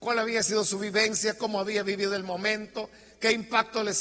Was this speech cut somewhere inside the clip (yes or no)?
no